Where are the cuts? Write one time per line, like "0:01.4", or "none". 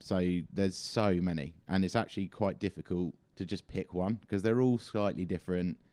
0:03.2